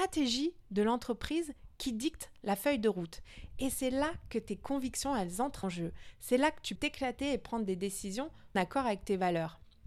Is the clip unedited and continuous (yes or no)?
no